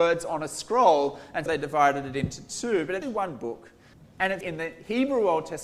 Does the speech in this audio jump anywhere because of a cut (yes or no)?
yes